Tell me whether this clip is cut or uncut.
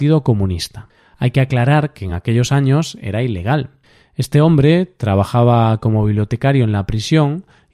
uncut